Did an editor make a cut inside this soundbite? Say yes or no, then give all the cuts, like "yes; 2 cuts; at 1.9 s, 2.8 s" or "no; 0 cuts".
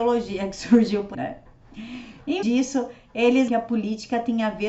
yes; 3 cuts; at 1.1 s, 2.4 s, 3.5 s